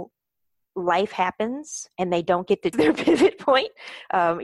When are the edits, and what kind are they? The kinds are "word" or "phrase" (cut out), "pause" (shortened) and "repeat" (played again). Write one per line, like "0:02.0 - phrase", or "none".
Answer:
0:02.7 - word